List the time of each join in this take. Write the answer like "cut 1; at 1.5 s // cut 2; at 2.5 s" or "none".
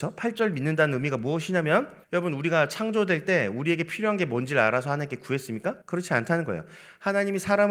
cut 1; at 2.0 s // cut 2; at 5.8 s